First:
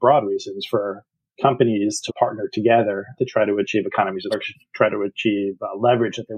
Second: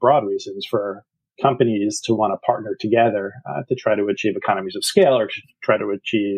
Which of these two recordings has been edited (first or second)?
first